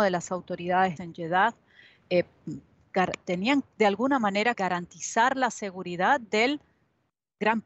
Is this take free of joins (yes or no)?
no